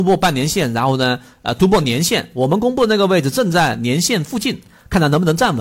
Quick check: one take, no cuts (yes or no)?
yes